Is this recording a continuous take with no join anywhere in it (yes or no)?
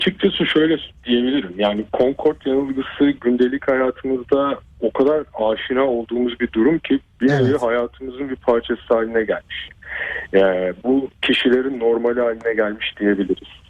yes